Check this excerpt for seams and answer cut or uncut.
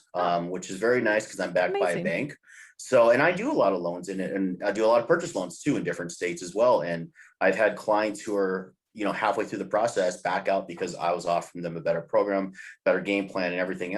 uncut